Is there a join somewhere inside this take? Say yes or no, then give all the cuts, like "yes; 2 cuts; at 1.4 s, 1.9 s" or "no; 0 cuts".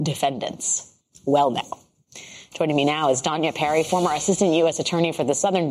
yes; 1 cut; at 1.0 s